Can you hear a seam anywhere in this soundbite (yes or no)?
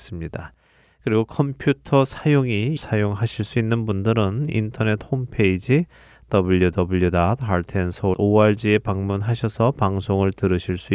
yes